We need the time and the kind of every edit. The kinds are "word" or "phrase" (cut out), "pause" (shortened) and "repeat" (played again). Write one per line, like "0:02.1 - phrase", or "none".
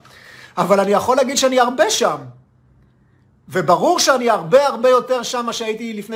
none